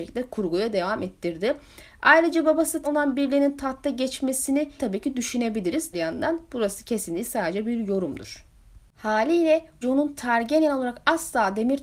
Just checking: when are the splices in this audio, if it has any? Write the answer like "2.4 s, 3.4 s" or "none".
2.8 s, 4.8 s, 5.9 s, 9.8 s